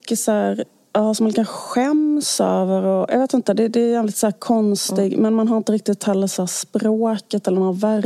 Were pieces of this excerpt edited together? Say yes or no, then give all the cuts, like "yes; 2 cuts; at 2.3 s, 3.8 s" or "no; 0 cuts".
no; 0 cuts